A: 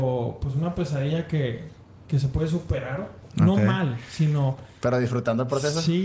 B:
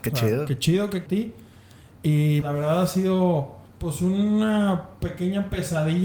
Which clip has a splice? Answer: B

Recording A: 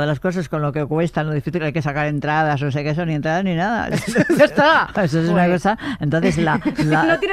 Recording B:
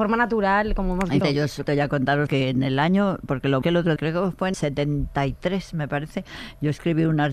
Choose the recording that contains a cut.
B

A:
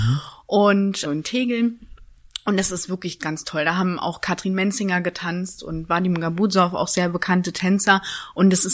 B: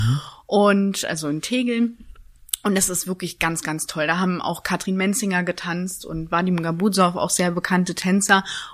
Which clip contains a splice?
A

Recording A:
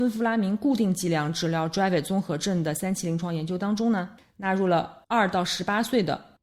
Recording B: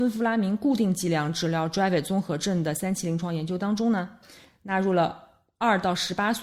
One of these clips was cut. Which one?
A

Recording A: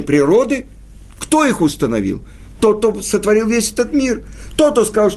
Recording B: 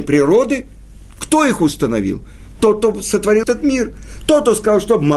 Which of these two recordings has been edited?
B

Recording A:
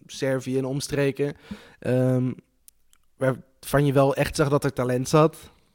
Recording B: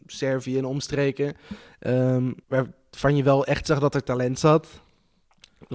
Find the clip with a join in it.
B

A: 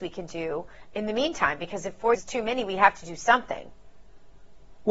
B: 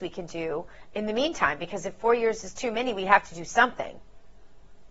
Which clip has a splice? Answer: A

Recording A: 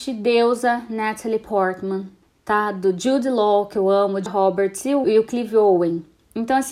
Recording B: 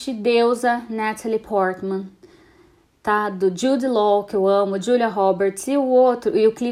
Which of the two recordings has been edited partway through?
A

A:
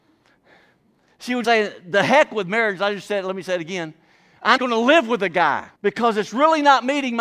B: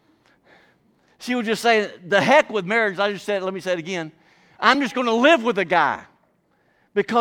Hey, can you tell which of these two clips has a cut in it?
A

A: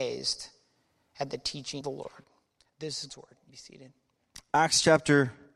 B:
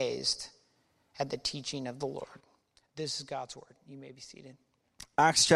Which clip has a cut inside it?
A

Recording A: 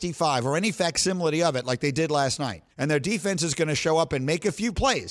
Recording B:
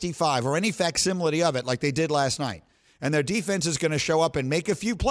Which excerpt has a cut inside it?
A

